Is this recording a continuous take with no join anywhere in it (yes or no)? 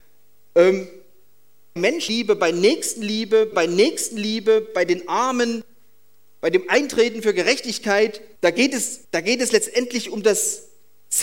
no